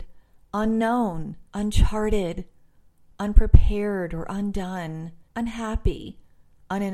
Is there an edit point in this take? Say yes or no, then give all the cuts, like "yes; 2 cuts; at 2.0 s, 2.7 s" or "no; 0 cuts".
yes; 2 cuts; at 1.5 s, 5.3 s